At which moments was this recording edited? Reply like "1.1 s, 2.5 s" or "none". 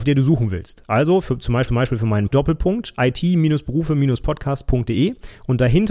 1.7 s, 2.3 s